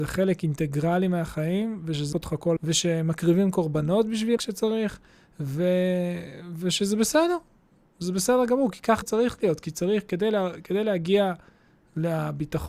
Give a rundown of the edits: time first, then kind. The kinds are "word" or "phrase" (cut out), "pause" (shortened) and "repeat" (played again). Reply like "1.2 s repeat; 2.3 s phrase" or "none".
2.1 s word; 2.6 s word; 4.4 s word; 9.0 s word